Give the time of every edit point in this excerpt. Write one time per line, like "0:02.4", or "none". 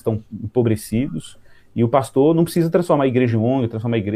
none